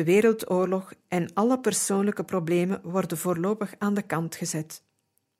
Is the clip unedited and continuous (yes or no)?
yes